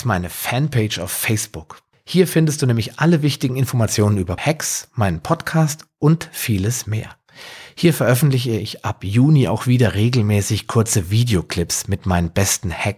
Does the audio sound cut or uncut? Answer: cut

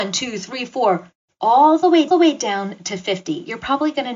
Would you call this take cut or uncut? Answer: cut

